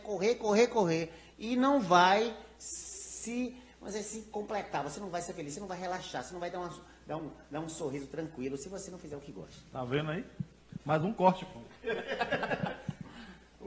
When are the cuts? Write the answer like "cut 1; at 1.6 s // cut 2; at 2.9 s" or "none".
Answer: none